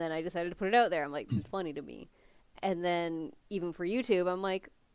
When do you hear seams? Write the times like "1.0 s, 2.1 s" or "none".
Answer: 1.3 s, 3.4 s